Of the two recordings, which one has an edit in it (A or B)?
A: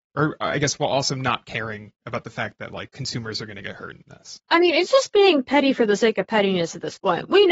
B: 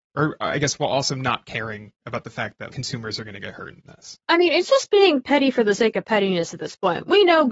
B